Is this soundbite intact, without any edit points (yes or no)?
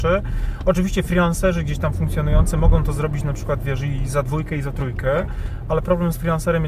yes